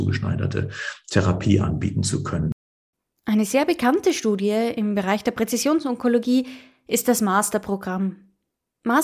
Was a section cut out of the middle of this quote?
no; 0 cuts

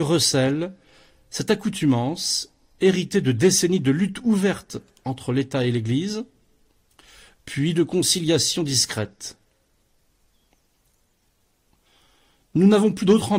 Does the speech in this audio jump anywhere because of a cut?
no; 0 cuts

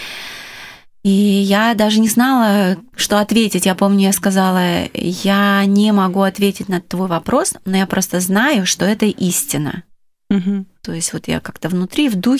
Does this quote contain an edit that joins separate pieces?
no; 0 cuts

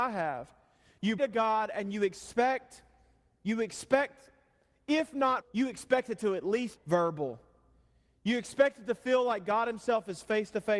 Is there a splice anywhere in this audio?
yes; 3 cuts; at 1.2 s, 5.4 s, 6.8 s

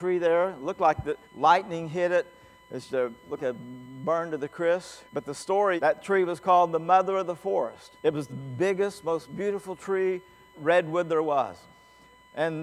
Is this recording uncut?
no; 8 cuts; at 1.2 s, 2.9 s, 3.4 s, 5.1 s, 5.8 s, 8.0 s, 8.3 s, 10.5 s

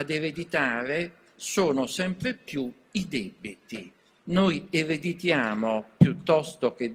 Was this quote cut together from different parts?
no; 0 cuts

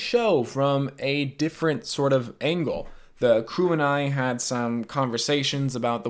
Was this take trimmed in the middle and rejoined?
no; 0 cuts

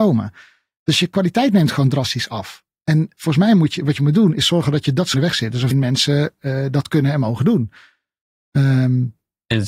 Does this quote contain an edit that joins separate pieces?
yes; 2 cuts; at 5.1 s, 5.7 s

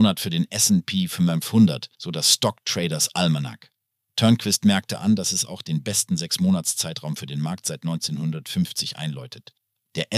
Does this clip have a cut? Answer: yes; 1 cut; at 1.9 s

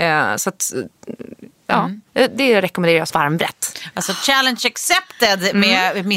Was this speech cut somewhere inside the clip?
yes; 2 cuts; at 2.1 s, 3.1 s

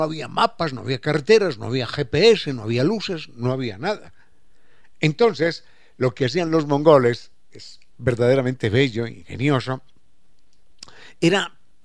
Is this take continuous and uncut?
yes; 0 cuts

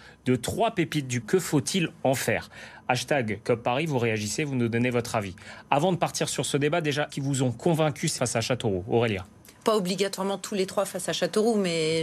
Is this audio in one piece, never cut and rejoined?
no; 4 cuts; at 1.2 s, 7.1 s, 8.2 s, 9.6 s

